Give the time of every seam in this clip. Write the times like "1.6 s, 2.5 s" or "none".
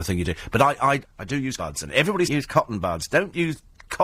1.0 s, 1.6 s, 2.3 s

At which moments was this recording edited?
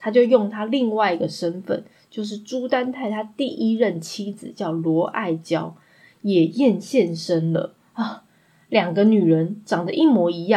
none

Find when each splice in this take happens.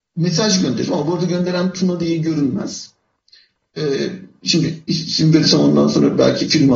none

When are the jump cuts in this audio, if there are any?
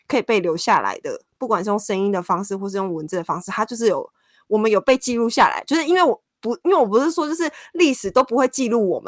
none

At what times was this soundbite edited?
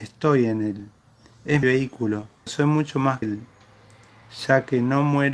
1.6 s, 2.5 s, 3.2 s

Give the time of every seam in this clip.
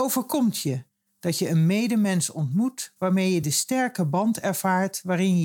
none

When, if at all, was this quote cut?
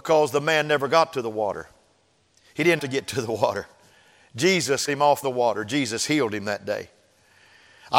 2.8 s, 4.9 s, 5.2 s

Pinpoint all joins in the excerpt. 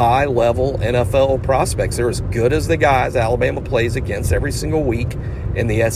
none

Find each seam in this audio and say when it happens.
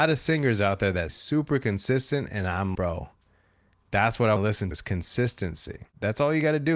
1.1 s, 2.7 s, 4.4 s, 4.7 s

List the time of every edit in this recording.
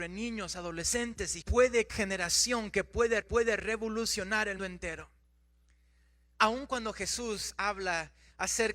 1.4 s, 1.9 s, 3.2 s, 4.6 s

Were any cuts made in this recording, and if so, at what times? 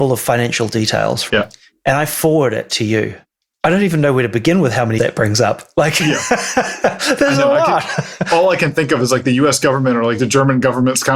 1.3 s, 5.0 s

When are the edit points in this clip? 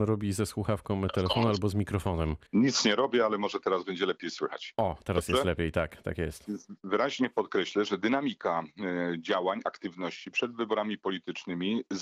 2.5 s

